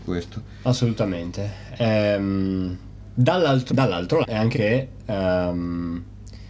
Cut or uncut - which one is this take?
cut